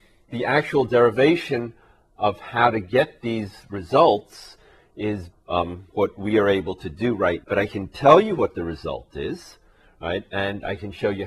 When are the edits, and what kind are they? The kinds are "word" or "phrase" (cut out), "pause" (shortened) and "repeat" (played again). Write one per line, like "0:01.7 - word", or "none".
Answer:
0:05.3 - word
0:07.4 - word